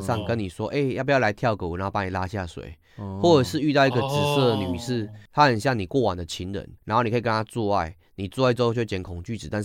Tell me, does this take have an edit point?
yes; 1 cut; at 6.8 s

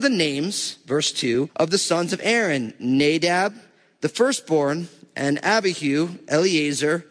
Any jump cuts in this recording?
no; 0 cuts

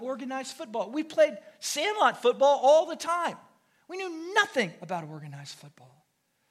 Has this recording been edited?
no; 0 cuts

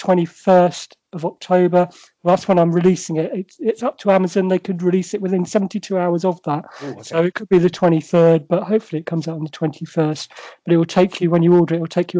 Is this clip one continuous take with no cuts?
yes; 0 cuts

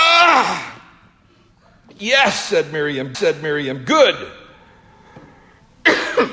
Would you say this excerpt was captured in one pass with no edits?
no; 1 cut; at 3.1 s

